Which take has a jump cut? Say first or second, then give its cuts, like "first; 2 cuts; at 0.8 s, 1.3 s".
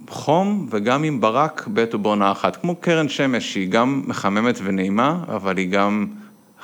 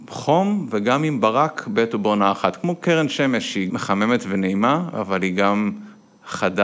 second; 1 cut; at 3.7 s